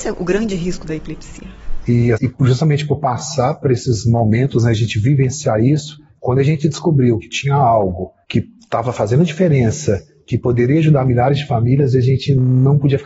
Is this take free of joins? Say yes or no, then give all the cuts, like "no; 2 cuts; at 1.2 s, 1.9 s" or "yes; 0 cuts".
no; 2 cuts; at 2.1 s, 8.2 s